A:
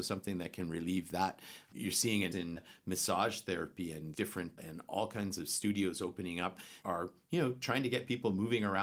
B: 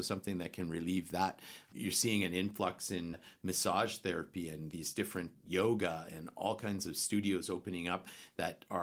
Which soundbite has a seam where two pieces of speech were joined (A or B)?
A